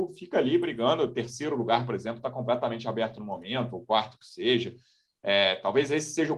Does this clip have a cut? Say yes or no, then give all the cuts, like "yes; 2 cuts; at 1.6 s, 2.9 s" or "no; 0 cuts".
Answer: no; 0 cuts